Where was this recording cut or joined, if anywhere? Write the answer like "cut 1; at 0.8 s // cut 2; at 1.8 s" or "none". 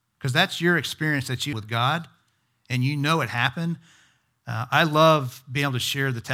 cut 1; at 1.5 s

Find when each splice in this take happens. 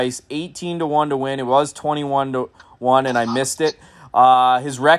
none

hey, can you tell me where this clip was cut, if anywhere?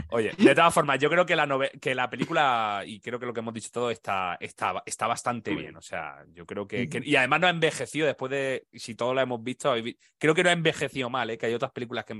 none

